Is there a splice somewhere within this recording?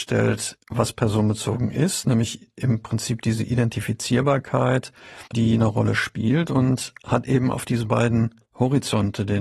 yes; 1 cut; at 5.3 s

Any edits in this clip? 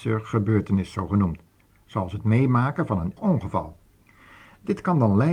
yes; 1 cut; at 3.2 s

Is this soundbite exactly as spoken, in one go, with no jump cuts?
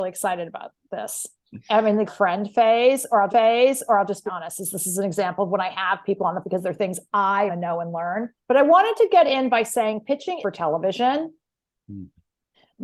no; 7 cuts; at 2.1 s, 3.3 s, 4.3 s, 6.4 s, 7.5 s, 8.4 s, 10.4 s

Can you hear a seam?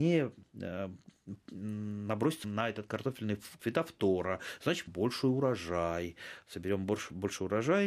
yes; 3 cuts; at 2.4 s, 3.6 s, 4.9 s

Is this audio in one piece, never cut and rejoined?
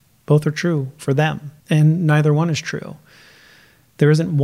no; 1 cut; at 1.6 s

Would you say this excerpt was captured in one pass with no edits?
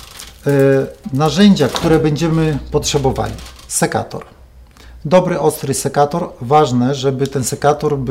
yes; 0 cuts

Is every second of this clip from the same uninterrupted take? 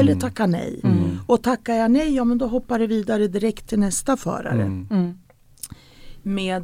yes; 0 cuts

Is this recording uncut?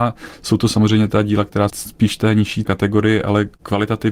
no; 2 cuts; at 1.7 s, 2.6 s

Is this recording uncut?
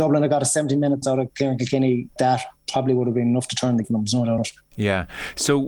no; 5 cuts; at 1.0 s, 2.2 s, 2.6 s, 3.8 s, 4.4 s

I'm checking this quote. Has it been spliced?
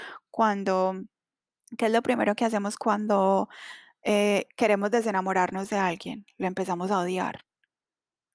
no; 0 cuts

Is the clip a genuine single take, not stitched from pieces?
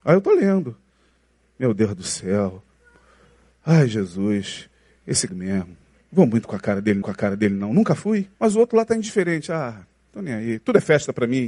no; 3 cuts; at 5.3 s, 7.0 s, 8.3 s

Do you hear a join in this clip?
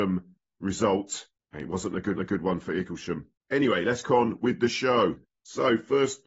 yes; 3 cuts; at 2.2 s, 4.0 s, 5.2 s

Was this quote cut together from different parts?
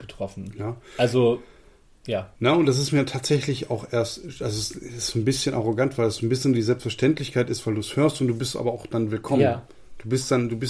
yes; 1 cut; at 2.4 s

